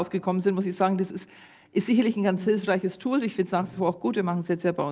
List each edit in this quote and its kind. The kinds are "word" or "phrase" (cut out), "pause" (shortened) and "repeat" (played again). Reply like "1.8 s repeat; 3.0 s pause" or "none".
none